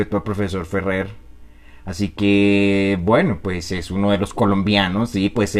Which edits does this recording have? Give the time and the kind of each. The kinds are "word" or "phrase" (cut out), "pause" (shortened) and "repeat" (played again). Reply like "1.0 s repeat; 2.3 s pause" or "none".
none